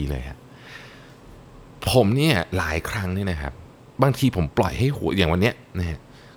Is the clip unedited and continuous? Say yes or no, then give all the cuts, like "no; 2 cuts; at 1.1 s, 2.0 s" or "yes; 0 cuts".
no; 1 cut; at 3.7 s